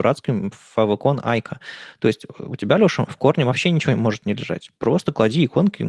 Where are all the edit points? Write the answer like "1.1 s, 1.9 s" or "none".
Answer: none